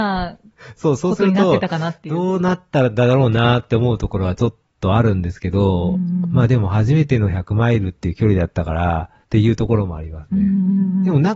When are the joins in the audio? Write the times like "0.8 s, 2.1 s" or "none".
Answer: 9.2 s